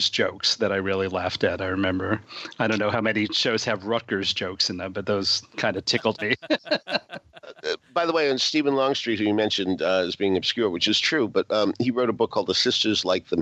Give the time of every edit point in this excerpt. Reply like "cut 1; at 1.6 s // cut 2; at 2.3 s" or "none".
none